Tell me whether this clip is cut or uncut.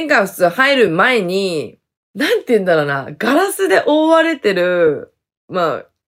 uncut